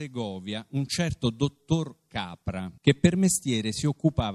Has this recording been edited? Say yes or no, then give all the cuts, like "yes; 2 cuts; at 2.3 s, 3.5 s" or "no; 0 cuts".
yes; 1 cut; at 2.8 s